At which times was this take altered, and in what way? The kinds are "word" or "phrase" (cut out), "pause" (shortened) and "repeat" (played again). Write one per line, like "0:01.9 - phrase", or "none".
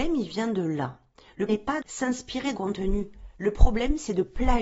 0:01.5 - word
0:01.8 - word
0:02.5 - word